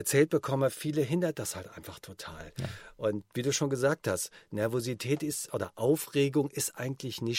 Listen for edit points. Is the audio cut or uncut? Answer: uncut